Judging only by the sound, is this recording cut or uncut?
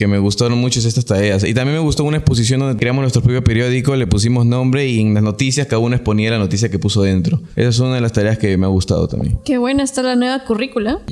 uncut